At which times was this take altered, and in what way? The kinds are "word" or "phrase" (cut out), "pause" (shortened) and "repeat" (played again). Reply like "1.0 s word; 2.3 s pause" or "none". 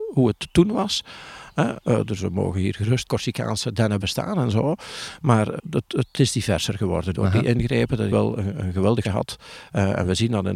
2.2 s word; 3.1 s word; 4.0 s word; 5.6 s word; 6.1 s word; 7.1 s word; 8.1 s word; 9.0 s word